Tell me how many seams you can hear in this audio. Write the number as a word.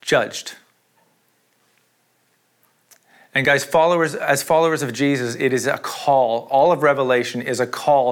zero